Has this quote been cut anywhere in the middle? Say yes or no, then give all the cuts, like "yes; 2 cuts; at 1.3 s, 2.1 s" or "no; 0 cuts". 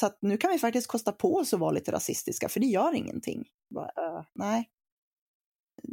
no; 0 cuts